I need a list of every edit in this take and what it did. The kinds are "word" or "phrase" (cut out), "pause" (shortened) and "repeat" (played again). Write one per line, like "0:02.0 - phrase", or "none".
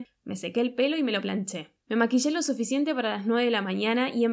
0:01.8 - pause